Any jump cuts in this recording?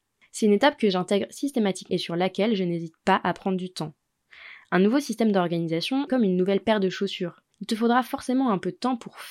yes; 3 cuts; at 1.9 s, 6.1 s, 7.5 s

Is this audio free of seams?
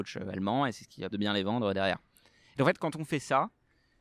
no; 1 cut; at 1.1 s

